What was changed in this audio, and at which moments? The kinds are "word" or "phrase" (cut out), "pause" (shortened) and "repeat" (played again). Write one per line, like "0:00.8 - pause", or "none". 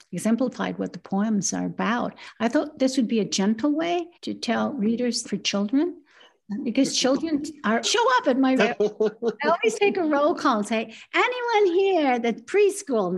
0:04.1 - pause
0:05.2 - phrase
0:07.8 - word
0:08.6 - word